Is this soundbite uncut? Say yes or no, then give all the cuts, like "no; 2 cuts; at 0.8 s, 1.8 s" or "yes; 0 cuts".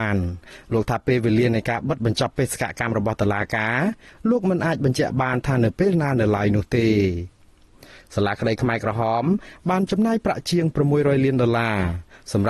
yes; 0 cuts